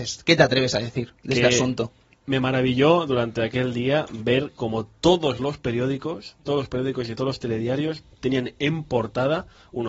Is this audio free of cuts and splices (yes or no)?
yes